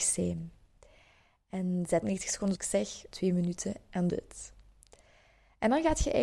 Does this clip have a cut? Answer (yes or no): yes